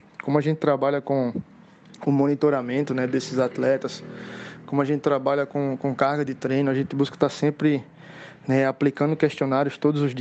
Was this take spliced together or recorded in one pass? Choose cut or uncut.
uncut